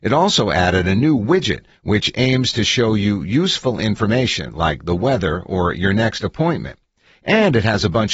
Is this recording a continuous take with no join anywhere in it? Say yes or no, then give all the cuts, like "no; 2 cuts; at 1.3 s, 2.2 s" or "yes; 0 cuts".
yes; 0 cuts